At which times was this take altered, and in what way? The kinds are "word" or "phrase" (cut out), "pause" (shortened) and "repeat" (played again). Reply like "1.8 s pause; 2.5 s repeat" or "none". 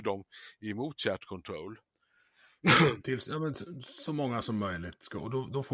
none